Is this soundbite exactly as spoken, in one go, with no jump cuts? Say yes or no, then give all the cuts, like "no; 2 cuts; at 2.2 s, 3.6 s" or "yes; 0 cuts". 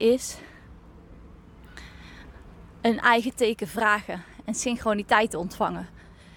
yes; 0 cuts